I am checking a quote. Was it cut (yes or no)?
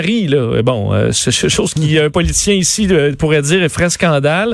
no